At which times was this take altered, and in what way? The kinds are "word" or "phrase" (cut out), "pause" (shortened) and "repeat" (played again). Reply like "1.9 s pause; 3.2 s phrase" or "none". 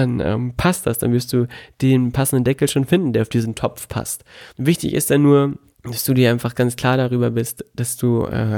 4.5 s pause; 5.7 s pause; 6.5 s word